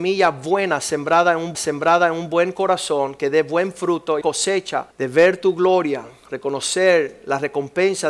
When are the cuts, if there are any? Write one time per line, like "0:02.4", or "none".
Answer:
0:01.5
0:04.2
0:04.9